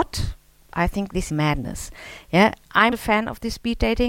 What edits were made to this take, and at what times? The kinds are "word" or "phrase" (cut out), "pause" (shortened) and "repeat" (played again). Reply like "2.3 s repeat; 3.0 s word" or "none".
1.3 s word; 2.9 s word